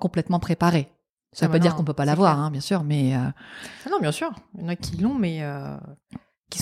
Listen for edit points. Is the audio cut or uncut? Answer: uncut